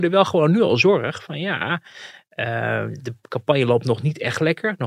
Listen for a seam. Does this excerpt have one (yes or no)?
no